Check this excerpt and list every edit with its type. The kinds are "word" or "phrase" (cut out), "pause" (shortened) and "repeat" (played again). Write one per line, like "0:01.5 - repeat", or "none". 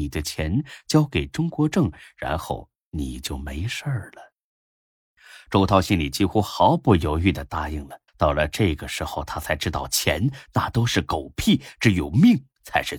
0:08.1 - pause